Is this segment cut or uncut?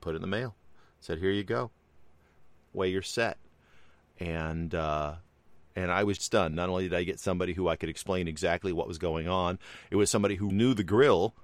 cut